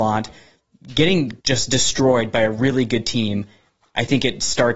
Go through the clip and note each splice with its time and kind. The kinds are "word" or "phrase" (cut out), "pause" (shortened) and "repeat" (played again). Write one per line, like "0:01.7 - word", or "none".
0:01.4 - pause